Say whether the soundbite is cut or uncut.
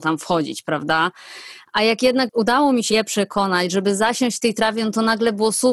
cut